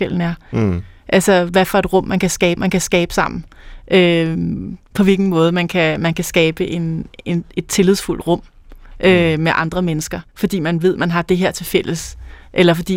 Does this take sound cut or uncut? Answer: cut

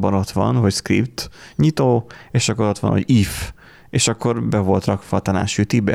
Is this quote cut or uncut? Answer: uncut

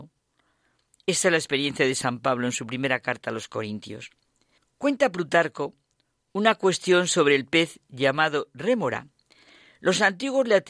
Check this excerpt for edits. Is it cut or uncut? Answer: uncut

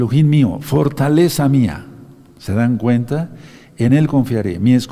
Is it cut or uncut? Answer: uncut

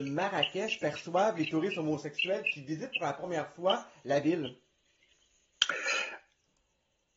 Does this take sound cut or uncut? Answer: uncut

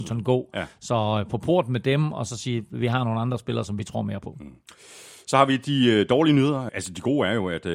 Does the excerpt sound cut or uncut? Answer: uncut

